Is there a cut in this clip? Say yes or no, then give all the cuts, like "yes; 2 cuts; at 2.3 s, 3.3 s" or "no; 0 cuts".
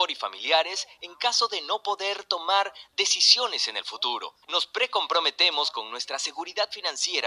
yes; 1 cut; at 4.4 s